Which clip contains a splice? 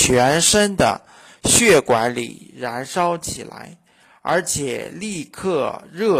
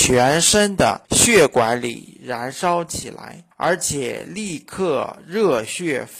second; 2 cuts; at 1.0 s, 3.5 s

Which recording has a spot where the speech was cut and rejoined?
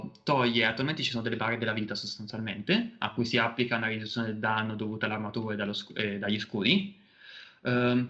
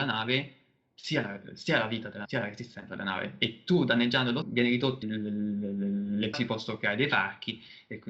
second; 4 cuts; at 2.2 s, 4.4 s, 5.0 s, 6.3 s

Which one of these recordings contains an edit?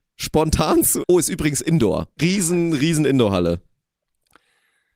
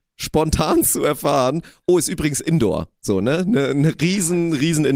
first; 2 cuts; at 1.0 s, 2.2 s

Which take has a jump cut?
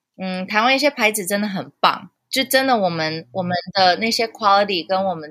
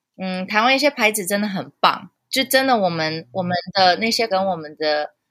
second; 1 cut; at 4.3 s

